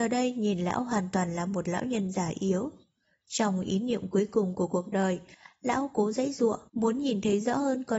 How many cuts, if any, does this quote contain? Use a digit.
1